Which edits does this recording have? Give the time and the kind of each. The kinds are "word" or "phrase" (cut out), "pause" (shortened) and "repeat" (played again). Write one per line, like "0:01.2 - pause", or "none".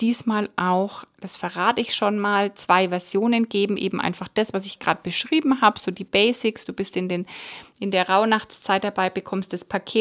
none